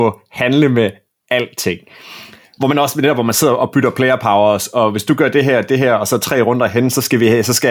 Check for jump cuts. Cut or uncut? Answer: uncut